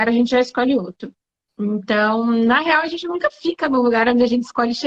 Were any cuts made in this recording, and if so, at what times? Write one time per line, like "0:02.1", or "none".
none